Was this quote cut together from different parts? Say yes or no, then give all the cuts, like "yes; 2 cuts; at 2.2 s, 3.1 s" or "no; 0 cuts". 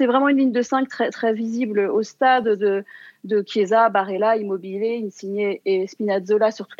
no; 0 cuts